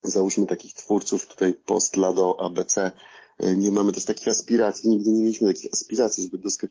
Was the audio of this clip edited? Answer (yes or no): no